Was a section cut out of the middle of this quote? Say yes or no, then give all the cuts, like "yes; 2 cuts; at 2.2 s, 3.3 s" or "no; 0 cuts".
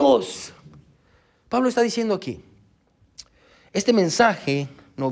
no; 0 cuts